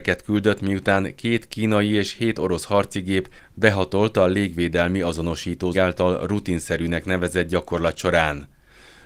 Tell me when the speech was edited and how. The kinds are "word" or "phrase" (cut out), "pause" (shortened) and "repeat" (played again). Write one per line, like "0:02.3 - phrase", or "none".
0:05.7 - phrase

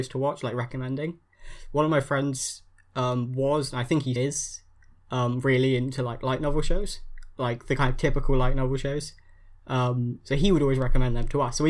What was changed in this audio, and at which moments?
0:04.2 - word

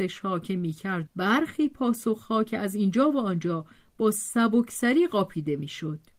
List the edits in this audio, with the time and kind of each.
0:01.1 - word

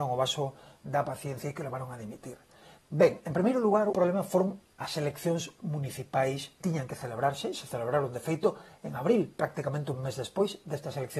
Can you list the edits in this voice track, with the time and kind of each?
0:03.9 - word
0:06.6 - word

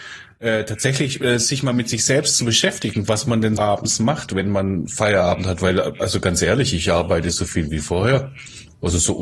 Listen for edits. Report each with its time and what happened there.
0:03.6 - word

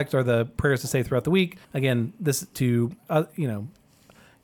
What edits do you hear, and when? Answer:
0:01.6 - pause
0:02.5 - word
0:03.0 - pause

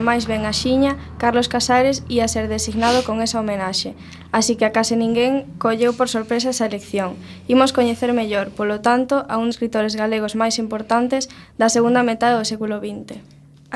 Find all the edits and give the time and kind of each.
0:09.5 - word

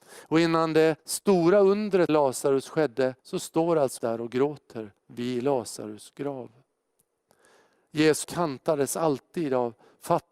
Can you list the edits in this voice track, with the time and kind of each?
0:01.0 - pause
0:02.1 - word
0:03.2 - pause
0:04.0 - word
0:05.0 - pause
0:08.2 - word

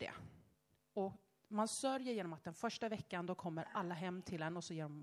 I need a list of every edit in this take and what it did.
none

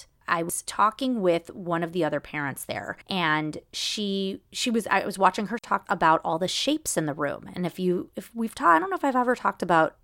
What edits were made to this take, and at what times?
0:03.0 - pause
0:04.5 - pause
0:05.6 - word

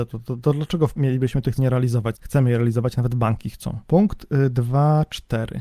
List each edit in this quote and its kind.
0:01.0 - word
0:01.6 - word
0:02.1 - word
0:03.8 - pause

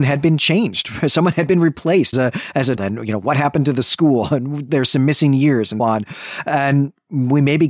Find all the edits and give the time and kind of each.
0:02.1 - word
0:02.8 - word
0:05.8 - word

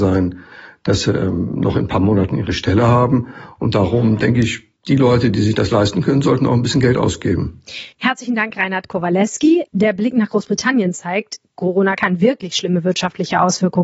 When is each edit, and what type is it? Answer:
0:04.8 - pause
0:07.9 - pause
0:09.7 - pause

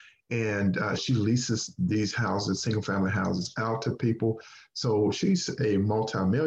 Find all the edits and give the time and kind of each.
0:01.0 - word

